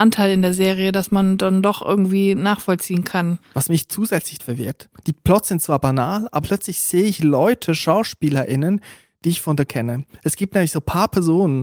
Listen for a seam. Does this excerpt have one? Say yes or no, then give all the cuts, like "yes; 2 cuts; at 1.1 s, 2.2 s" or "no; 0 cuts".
yes; 3 cuts; at 4.4 s, 6.4 s, 9.7 s